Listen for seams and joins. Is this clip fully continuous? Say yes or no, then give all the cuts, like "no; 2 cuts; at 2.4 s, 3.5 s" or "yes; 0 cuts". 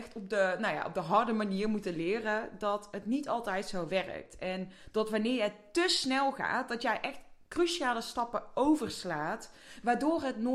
yes; 0 cuts